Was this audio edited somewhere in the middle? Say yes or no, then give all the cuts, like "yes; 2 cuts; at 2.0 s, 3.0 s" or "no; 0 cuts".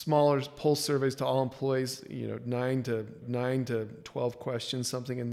yes; 1 cut; at 3.2 s